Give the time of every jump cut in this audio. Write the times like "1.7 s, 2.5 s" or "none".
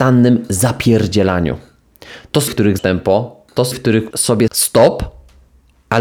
2.5 s, 2.8 s, 3.7 s, 4.1 s, 4.5 s

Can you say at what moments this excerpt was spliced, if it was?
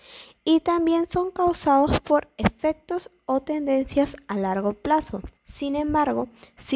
5.4 s

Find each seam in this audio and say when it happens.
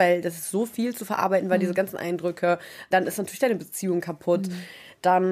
2.9 s

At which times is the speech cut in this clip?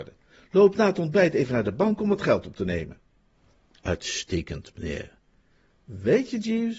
none

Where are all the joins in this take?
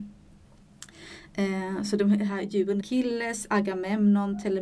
2.8 s

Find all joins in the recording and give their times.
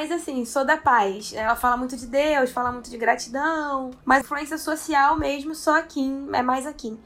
4.2 s

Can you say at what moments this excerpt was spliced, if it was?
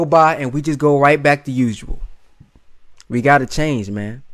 none

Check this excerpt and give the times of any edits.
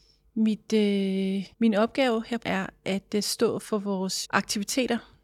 1.5 s, 2.4 s, 4.2 s

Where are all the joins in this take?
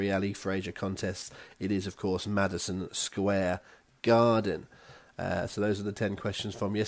none

